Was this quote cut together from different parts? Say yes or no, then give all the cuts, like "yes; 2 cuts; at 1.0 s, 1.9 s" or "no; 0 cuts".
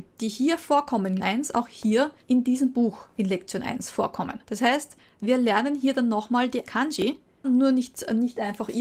yes; 5 cuts; at 1.2 s, 2.2 s, 4.4 s, 6.7 s, 7.4 s